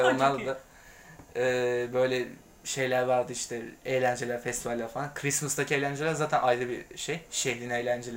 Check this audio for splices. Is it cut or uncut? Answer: uncut